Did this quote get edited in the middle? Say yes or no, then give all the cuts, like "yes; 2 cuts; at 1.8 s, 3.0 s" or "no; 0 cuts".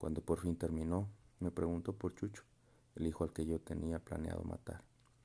no; 0 cuts